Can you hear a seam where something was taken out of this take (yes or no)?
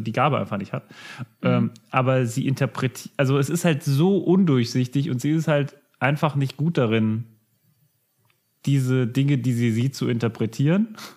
no